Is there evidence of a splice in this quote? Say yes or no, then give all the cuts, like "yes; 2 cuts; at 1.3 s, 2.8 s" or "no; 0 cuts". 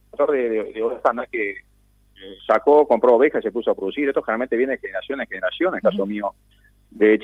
yes; 1 cut; at 2.4 s